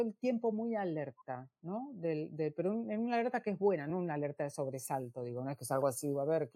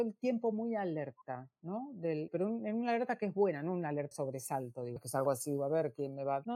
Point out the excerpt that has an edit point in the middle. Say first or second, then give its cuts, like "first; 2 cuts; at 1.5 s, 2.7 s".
second; 3 cuts; at 2.3 s, 4.1 s, 5.0 s